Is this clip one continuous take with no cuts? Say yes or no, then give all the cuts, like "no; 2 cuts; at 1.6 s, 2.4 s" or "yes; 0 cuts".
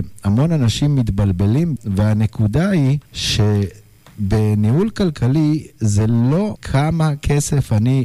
no; 3 cuts; at 1.8 s, 3.1 s, 6.5 s